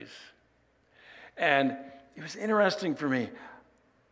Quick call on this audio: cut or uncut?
uncut